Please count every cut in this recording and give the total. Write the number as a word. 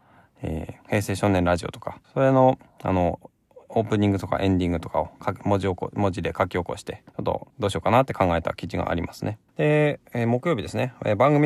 four